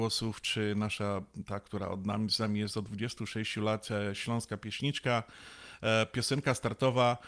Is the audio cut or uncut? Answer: uncut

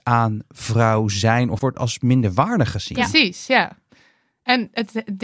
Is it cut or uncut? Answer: cut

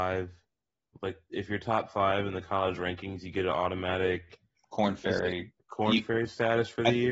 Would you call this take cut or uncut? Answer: uncut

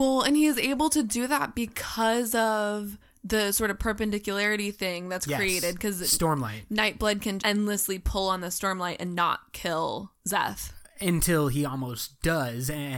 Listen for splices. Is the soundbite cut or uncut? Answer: cut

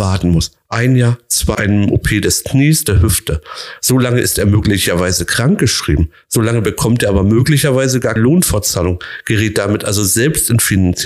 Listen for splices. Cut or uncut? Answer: cut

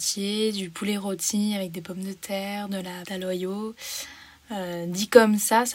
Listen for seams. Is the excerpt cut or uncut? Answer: cut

